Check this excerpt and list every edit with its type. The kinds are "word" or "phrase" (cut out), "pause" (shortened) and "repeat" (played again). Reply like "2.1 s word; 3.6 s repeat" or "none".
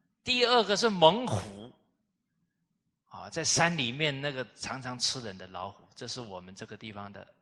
none